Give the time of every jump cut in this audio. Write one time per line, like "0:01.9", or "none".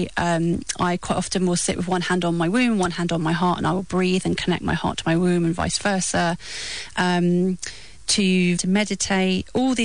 0:08.6